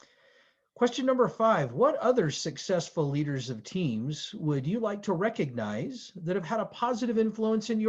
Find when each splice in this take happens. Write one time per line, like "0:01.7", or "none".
none